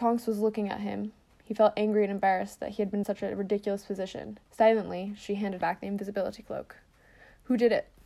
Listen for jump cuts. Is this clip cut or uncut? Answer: cut